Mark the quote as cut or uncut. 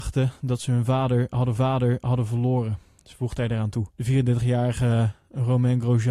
cut